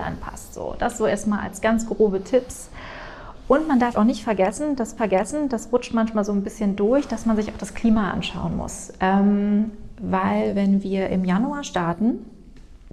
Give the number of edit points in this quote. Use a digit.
2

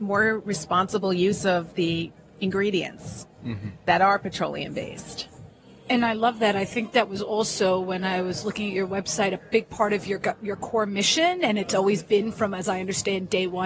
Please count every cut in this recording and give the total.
0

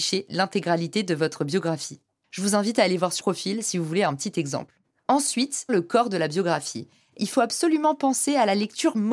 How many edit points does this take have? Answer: 3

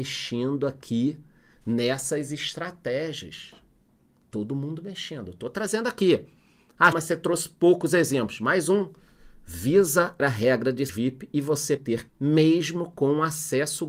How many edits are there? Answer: 5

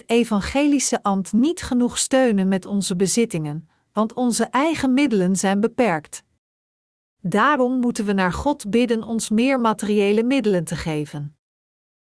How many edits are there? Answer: 0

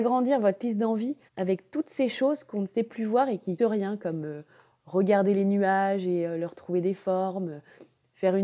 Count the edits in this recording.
2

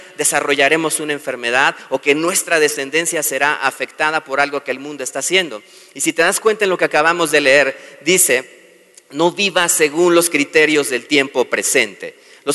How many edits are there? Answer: 0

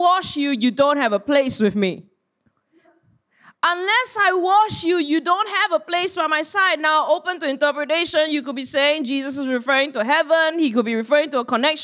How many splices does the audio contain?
0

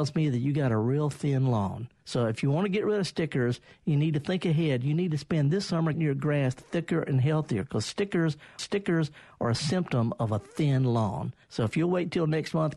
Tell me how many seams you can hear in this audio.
4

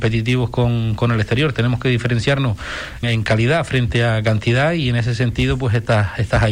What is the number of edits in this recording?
1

